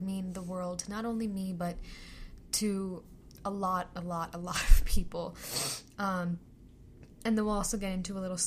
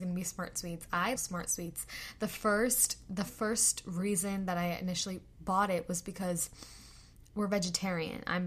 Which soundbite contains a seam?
second; 2 cuts; at 1.2 s, 7.3 s

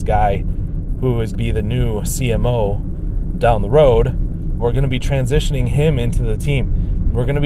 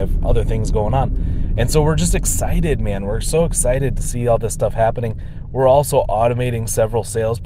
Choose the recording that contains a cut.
first; 3 cuts; at 1.3 s, 3.3 s, 4.6 s

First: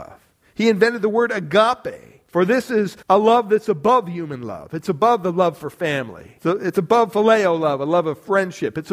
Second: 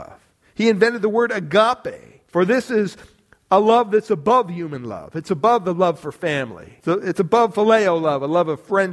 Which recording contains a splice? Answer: first; 1 cut; at 3.0 s

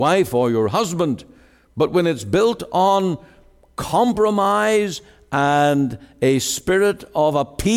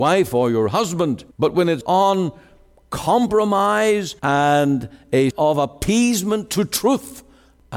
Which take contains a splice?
second; 4 cuts; at 1.3 s, 1.8 s, 4.2 s, 5.3 s

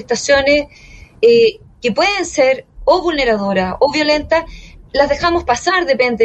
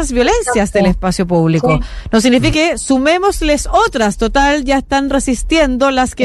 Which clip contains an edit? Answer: second; 1 cut; at 2.5 s

